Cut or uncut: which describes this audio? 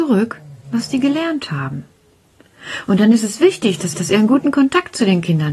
cut